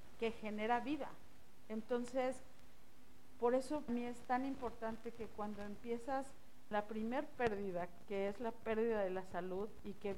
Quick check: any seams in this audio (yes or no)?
yes